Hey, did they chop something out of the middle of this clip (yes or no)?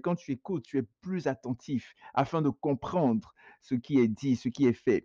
no